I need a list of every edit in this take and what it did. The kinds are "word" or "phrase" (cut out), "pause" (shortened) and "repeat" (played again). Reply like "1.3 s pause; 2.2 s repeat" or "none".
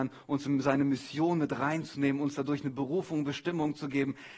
none